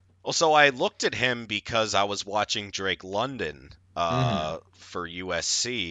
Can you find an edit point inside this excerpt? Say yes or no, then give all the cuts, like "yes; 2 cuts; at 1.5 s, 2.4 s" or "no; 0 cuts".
no; 0 cuts